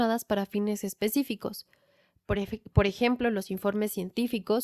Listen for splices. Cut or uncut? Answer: uncut